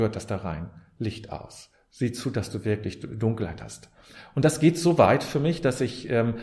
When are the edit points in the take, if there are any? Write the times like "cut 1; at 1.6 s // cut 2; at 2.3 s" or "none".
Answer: none